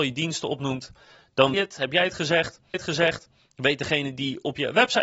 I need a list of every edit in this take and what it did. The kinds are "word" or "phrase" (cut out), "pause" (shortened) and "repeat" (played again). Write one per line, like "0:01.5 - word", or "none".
0:01.5 - phrase
0:02.7 - repeat